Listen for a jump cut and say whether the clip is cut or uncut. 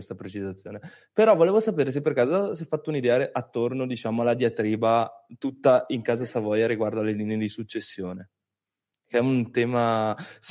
uncut